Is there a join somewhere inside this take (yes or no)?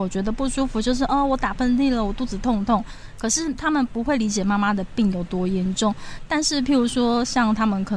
no